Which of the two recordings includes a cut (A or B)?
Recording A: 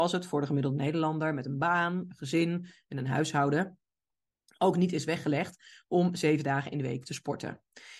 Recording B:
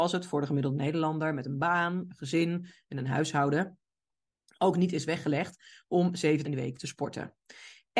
B